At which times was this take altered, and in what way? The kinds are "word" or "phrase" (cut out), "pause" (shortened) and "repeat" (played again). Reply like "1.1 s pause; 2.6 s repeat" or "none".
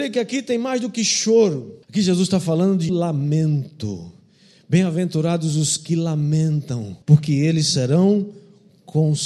1.8 s pause; 2.9 s word; 7.0 s pause